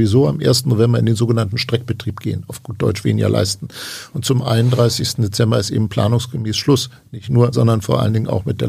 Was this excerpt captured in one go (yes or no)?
no